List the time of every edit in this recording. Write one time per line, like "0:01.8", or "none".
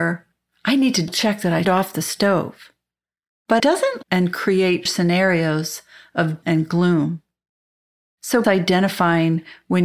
0:01.1
0:01.6
0:03.6
0:04.0
0:04.9
0:06.4
0:08.4